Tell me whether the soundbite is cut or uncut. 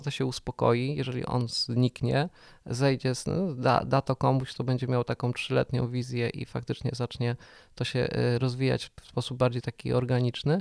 uncut